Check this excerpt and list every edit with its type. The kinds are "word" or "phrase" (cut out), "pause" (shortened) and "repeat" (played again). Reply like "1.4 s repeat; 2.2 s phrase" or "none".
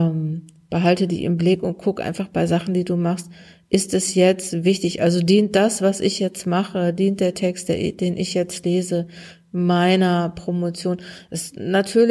none